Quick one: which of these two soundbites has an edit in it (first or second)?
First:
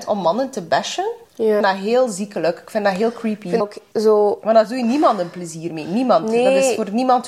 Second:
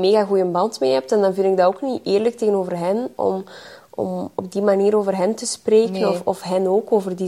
first